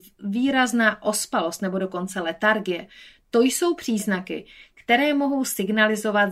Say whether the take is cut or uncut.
uncut